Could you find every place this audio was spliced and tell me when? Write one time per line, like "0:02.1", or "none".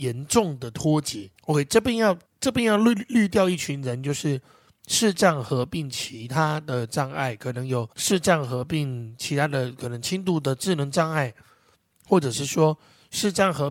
0:01.4
0:02.2
0:07.9